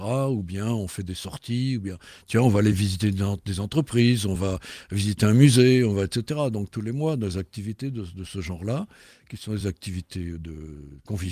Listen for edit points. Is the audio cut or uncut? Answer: uncut